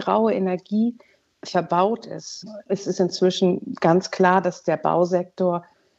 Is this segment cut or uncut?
uncut